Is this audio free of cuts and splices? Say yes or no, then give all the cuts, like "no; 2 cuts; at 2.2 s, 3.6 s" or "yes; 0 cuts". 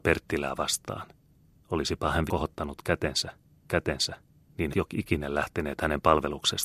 no; 4 cuts; at 1.5 s, 2.3 s, 3.7 s, 4.7 s